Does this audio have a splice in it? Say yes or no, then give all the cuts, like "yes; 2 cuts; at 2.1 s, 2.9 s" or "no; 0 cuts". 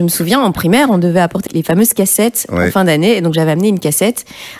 yes; 1 cut; at 1.5 s